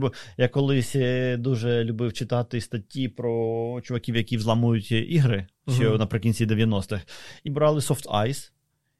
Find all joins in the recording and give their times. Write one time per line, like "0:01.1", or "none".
0:07.5

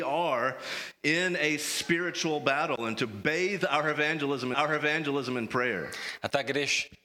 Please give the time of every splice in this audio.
0:04.5

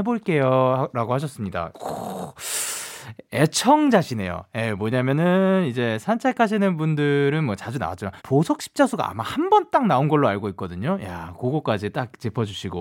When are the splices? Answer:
0:08.2

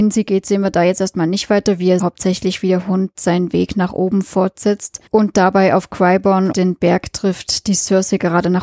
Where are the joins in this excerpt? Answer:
0:02.0
0:05.1
0:06.5

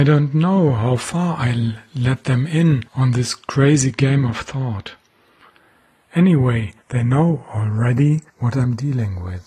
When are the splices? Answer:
0:02.9
0:06.8
0:08.3

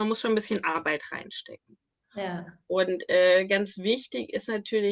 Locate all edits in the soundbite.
none

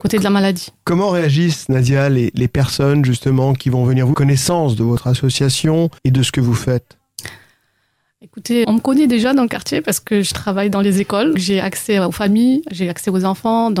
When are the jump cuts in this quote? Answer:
0:04.1
0:06.0
0:08.6
0:11.3

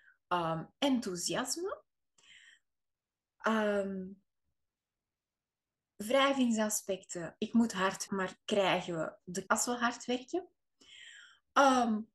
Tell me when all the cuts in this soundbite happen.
0:07.4
0:08.1
0:08.4
0:09.5

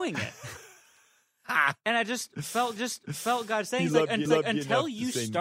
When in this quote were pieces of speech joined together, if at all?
0:02.8
0:04.3

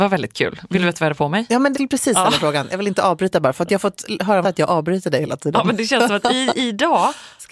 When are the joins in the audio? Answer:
0:01.7
0:04.4

